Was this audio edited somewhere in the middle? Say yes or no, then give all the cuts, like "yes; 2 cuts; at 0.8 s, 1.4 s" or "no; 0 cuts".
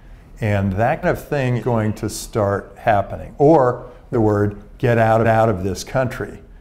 yes; 4 cuts; at 1.0 s, 1.6 s, 4.1 s, 5.2 s